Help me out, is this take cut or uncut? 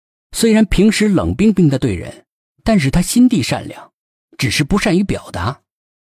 uncut